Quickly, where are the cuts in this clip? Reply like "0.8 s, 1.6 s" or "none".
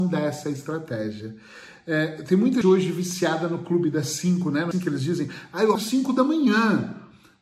2.6 s, 4.7 s, 5.8 s